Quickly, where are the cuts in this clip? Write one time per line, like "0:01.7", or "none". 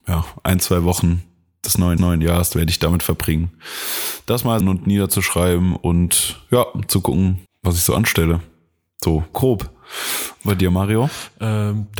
0:02.0
0:04.6
0:07.5
0:09.3